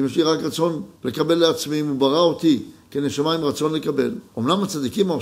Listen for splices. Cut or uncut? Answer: cut